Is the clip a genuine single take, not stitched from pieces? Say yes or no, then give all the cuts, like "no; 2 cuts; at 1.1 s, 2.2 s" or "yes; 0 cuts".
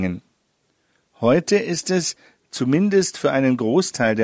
yes; 0 cuts